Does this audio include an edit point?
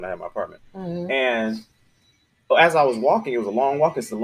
no; 0 cuts

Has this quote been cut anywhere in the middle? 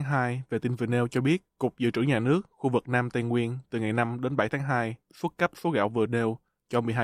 yes; 1 cut; at 1.5 s

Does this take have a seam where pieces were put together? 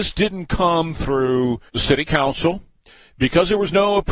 yes; 1 cut; at 1.7 s

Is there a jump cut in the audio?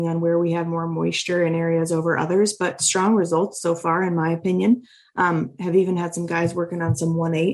no; 0 cuts

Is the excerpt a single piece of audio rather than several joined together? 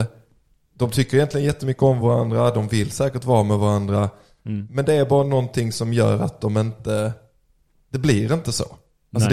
yes; 0 cuts

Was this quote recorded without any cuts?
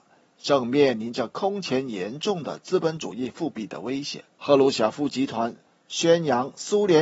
no; 1 cut; at 4.3 s

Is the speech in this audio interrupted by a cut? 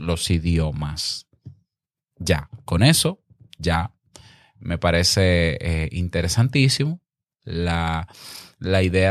no; 0 cuts

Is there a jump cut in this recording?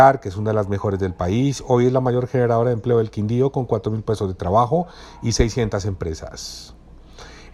no; 0 cuts

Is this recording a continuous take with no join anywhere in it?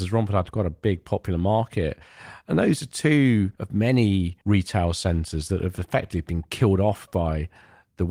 no; 2 cuts; at 3.5 s, 4.4 s

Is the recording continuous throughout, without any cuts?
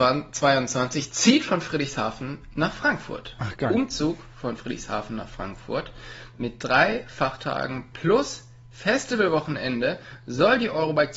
yes; 0 cuts

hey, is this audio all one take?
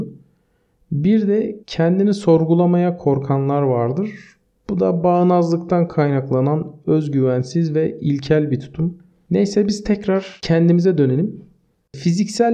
no; 1 cut; at 1.6 s

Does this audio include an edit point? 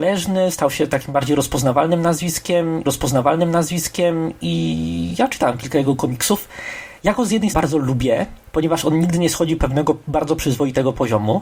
yes; 4 cuts; at 2.9 s, 7.5 s, 8.5 s, 9.6 s

